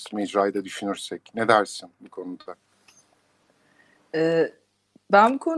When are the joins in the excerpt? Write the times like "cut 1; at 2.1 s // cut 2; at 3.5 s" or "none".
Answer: none